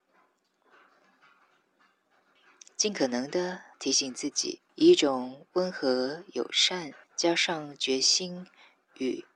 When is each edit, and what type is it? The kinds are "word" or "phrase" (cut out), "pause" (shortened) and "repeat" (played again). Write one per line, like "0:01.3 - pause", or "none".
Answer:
0:03.7 - pause
0:04.7 - pause
0:07.0 - pause